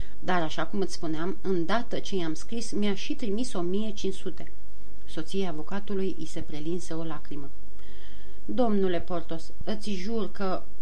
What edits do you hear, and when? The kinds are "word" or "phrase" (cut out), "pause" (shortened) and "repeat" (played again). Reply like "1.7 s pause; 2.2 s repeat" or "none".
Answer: none

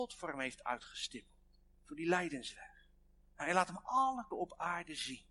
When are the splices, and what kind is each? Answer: 1.7 s pause; 3.2 s pause; 4.3 s word

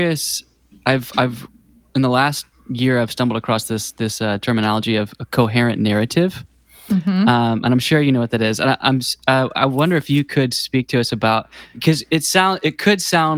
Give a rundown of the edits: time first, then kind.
none

